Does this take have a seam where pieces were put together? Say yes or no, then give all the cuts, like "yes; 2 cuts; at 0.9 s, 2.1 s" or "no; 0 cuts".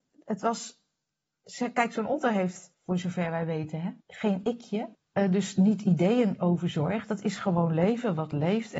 yes; 3 cuts; at 2.7 s, 4.0 s, 4.9 s